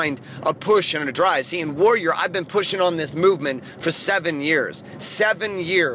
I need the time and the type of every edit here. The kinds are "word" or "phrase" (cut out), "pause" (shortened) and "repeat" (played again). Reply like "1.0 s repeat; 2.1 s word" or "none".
none